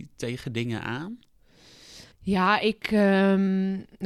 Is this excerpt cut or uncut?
cut